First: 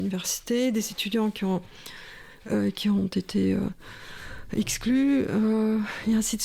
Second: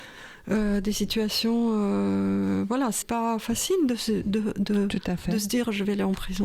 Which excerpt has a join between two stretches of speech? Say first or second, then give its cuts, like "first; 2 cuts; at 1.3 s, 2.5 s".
second; 1 cut; at 3.0 s